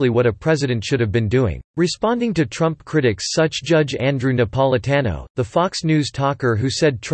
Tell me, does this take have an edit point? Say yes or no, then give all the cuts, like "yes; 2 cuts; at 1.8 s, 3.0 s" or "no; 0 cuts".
yes; 1 cut; at 1.7 s